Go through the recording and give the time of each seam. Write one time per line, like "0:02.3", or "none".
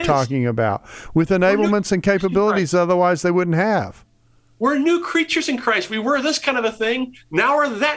none